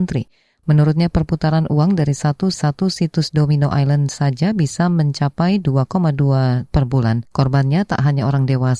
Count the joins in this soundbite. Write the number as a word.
three